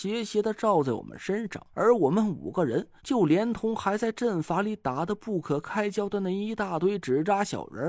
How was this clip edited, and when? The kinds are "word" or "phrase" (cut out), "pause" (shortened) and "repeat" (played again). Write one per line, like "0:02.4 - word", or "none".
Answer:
0:01.7 - pause
0:03.0 - pause